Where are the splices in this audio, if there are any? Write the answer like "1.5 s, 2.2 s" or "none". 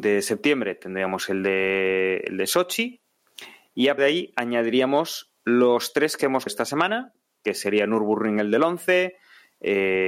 4.0 s, 6.5 s